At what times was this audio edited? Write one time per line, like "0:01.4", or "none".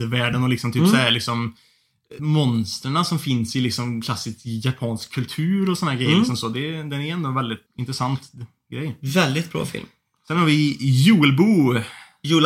0:02.2
0:07.7